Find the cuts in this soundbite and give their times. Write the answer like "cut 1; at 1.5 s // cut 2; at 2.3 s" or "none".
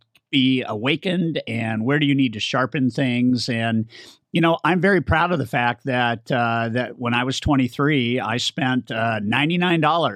none